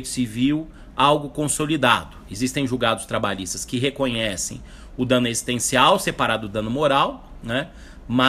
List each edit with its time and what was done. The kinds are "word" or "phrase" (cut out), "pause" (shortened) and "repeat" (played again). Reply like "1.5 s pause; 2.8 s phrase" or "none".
none